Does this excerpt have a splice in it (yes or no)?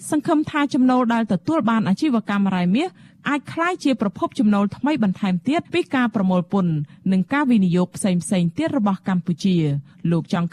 yes